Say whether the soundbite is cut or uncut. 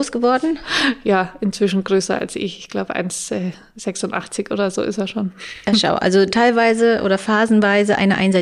uncut